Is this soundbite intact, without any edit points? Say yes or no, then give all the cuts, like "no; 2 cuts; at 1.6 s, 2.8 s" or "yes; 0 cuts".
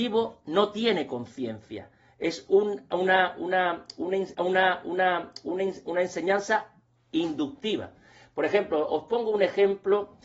no; 1 cut; at 4.3 s